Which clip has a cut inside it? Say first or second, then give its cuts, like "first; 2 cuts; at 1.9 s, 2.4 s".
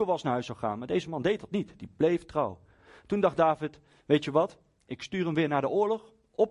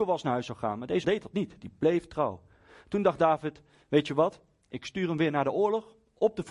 second; 1 cut; at 1.0 s